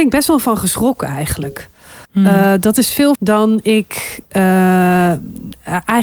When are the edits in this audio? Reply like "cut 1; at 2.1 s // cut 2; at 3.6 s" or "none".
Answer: cut 1; at 2.0 s // cut 2; at 3.2 s